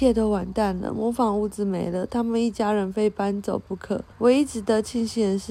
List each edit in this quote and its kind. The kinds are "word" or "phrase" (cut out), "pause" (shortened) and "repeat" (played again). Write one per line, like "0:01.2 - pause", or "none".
0:04.1 - pause